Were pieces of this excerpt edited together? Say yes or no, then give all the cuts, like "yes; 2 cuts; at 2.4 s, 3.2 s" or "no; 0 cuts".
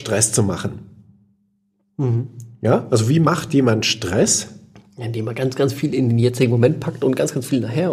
no; 0 cuts